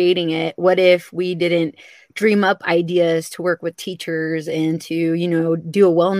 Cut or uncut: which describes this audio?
uncut